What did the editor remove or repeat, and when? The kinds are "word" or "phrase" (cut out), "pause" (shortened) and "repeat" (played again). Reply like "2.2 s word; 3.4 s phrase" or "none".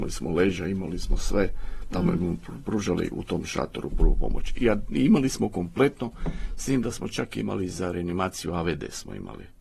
none